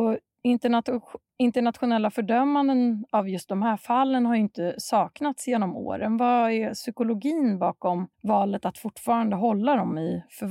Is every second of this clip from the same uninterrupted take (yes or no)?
no